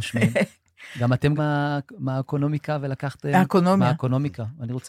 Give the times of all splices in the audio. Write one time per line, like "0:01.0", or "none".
0:01.4